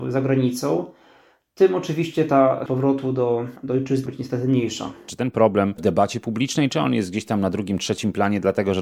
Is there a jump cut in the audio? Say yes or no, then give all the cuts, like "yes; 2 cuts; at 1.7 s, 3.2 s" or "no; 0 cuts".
yes; 4 cuts; at 2.7 s, 3.6 s, 4.1 s, 5.8 s